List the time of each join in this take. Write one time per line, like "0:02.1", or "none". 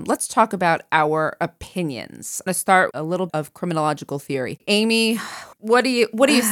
0:02.5
0:02.9
0:03.3
0:05.5